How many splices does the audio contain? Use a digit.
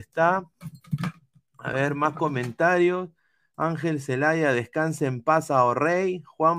0